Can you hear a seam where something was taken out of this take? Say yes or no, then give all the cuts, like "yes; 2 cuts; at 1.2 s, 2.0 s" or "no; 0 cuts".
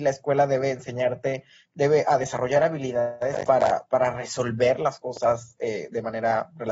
no; 0 cuts